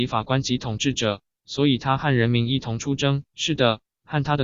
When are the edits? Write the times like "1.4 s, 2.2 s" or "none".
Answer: 3.3 s